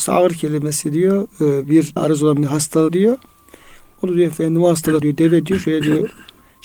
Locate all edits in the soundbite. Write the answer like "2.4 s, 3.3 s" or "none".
2.0 s, 2.9 s, 5.0 s